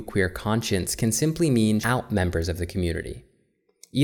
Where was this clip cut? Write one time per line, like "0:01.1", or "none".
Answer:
0:01.8